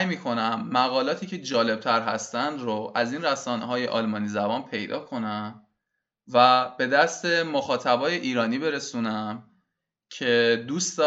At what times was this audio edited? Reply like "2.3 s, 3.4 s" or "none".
none